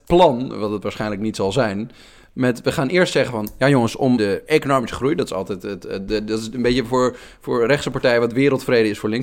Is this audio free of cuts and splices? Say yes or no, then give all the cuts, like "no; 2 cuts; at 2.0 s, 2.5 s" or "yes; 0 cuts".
no; 1 cut; at 4.2 s